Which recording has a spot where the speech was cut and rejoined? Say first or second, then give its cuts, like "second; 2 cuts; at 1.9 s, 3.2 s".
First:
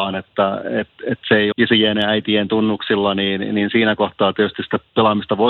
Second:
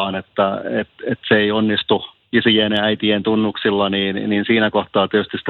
first; 1 cut; at 1.5 s